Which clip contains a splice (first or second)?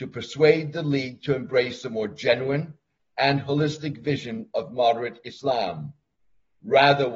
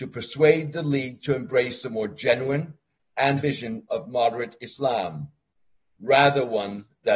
second